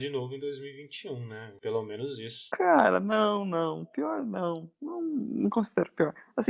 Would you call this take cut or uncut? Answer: uncut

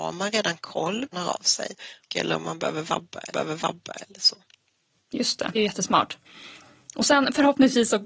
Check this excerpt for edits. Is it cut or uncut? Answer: cut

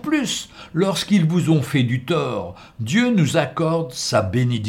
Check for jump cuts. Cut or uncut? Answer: uncut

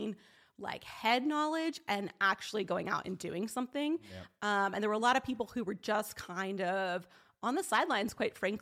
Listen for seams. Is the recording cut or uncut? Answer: uncut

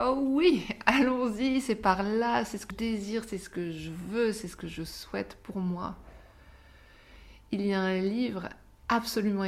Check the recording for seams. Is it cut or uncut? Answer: cut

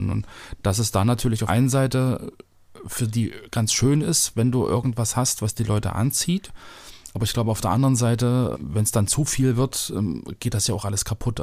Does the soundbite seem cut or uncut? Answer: cut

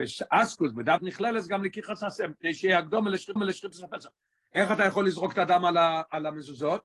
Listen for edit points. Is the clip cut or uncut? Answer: cut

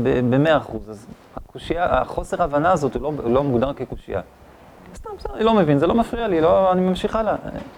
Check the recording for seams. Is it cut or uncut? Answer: uncut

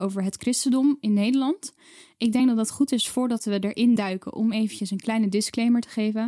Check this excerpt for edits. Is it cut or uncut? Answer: uncut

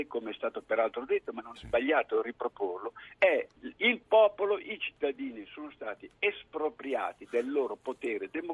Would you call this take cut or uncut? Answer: cut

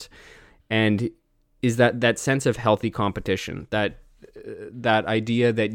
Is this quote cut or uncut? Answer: uncut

